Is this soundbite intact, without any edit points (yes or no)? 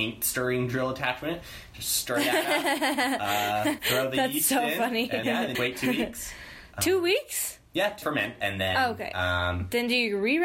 no